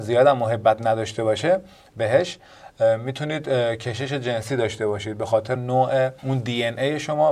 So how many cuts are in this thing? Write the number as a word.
two